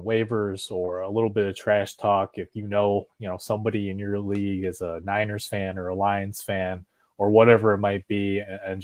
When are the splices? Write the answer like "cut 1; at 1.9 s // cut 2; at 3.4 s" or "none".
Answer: none

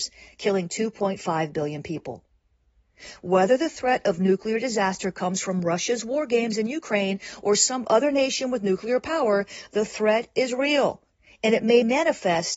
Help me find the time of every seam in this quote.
none

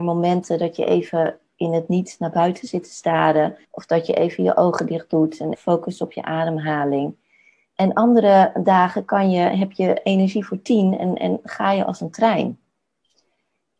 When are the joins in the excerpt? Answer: cut 1; at 3.6 s // cut 2; at 5.5 s

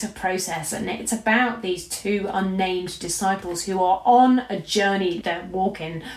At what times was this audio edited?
cut 1; at 5.2 s

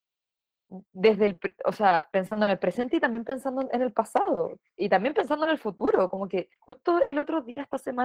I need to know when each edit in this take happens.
cut 1; at 6.6 s

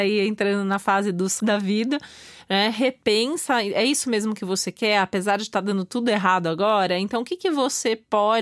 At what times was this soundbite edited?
cut 1; at 1.4 s

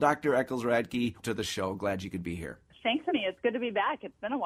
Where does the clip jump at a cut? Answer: cut 1; at 1.2 s // cut 2; at 2.7 s // cut 3; at 3.1 s

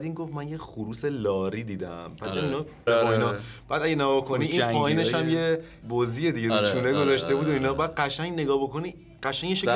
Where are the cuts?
cut 1; at 2.9 s // cut 2; at 5.8 s

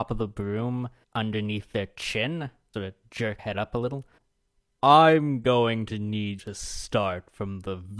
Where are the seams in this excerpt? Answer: cut 1; at 1.0 s // cut 2; at 2.7 s // cut 3; at 3.4 s // cut 4; at 6.4 s

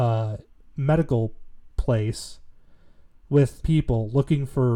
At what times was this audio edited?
cut 1; at 3.6 s

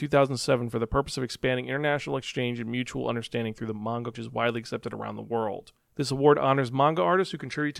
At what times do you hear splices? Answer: cut 1; at 4.1 s // cut 2; at 5.8 s

